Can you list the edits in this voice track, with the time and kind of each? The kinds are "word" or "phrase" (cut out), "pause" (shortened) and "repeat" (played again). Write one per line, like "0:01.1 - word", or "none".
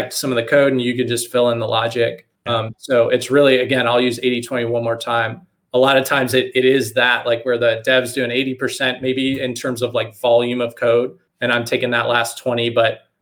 0:02.4 - pause
0:11.3 - pause